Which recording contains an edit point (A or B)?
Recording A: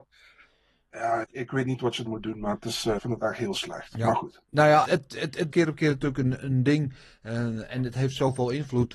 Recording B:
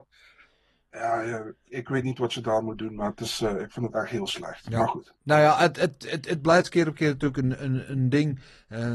A